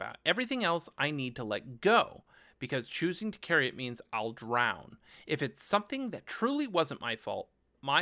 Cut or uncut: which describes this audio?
uncut